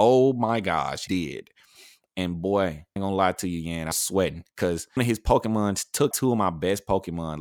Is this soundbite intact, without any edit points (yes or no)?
no